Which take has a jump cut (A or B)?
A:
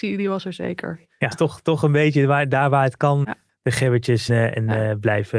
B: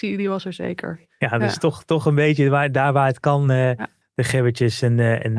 A